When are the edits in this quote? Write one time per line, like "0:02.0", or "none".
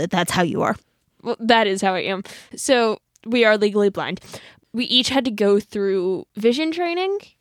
none